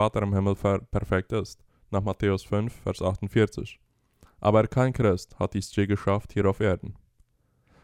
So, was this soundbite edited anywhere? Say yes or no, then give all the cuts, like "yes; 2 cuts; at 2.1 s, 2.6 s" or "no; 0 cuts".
no; 0 cuts